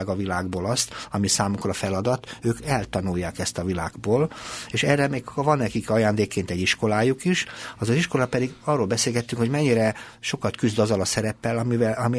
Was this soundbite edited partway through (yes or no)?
no